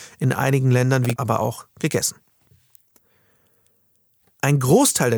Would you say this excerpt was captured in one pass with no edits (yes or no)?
no